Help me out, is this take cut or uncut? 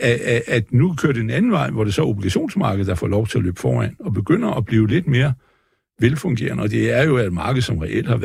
uncut